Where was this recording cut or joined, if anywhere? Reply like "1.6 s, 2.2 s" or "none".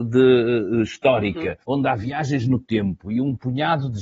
1.6 s